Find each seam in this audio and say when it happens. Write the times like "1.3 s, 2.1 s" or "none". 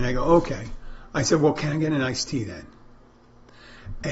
none